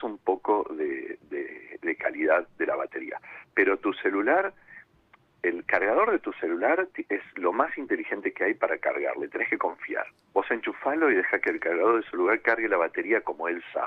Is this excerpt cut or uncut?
uncut